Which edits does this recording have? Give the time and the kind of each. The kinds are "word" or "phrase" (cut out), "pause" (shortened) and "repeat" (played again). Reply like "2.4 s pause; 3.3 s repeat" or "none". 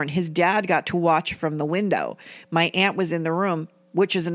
none